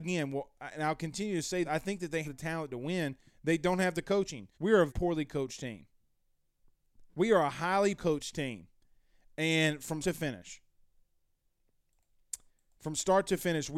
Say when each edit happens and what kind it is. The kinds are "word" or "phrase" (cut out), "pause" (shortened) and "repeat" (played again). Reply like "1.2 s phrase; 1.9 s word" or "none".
1.6 s word; 2.2 s word; 4.5 s pause; 4.9 s word; 7.1 s pause; 8.0 s word; 10.0 s word; 12.5 s pause